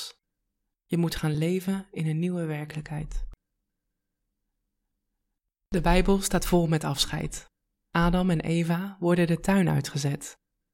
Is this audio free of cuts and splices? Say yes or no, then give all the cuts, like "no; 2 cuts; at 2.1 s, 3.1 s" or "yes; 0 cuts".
yes; 0 cuts